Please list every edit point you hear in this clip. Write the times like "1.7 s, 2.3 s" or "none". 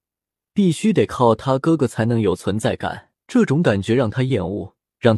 3.2 s